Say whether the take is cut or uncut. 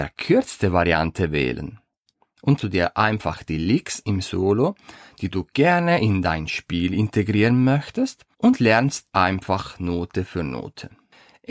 cut